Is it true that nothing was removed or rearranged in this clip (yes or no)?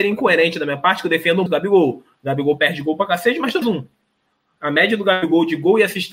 no